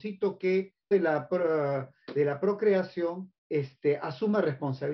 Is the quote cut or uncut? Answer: cut